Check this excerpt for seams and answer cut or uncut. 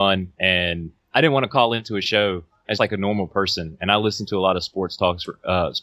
cut